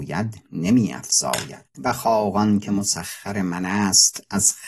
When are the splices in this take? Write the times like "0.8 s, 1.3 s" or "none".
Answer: 1.7 s